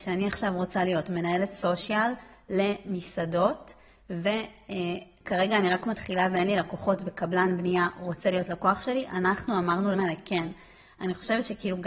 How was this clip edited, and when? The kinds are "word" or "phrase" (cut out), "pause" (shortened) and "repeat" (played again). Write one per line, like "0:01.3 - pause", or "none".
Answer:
0:09.9 - word